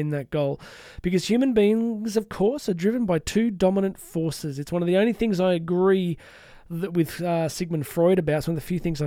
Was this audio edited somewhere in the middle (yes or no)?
no